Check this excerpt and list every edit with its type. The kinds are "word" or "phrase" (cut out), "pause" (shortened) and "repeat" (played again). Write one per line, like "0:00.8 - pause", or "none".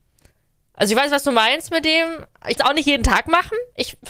0:02.6 - word